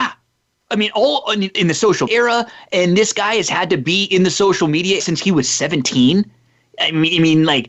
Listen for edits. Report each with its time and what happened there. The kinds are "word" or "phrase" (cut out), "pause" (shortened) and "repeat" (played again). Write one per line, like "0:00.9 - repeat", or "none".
0:01.5 - word
0:02.1 - word
0:05.0 - word